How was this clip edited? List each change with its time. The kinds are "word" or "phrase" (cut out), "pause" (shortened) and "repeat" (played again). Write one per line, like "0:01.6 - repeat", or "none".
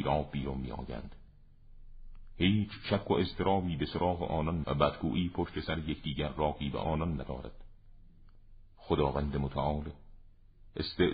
0:04.6 - word